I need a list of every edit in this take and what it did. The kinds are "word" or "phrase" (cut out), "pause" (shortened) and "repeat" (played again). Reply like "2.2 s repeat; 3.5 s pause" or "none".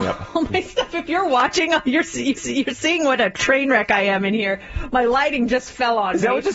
2.4 s repeat